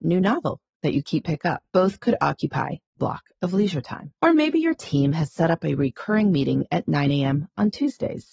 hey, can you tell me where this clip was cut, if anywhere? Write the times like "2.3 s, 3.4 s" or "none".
1.2 s, 1.7 s, 3.0 s, 4.2 s